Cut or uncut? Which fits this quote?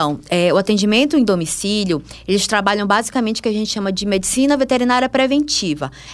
uncut